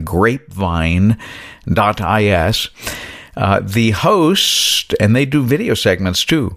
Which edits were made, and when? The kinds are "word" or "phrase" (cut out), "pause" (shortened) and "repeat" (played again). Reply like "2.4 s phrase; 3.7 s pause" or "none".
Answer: none